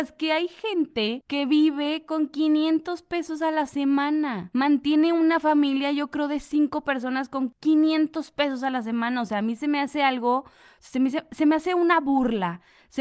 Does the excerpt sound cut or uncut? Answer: uncut